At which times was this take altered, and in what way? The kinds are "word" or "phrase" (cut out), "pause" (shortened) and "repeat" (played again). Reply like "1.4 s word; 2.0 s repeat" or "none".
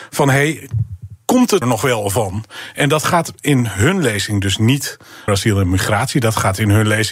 1.6 s word; 5.3 s word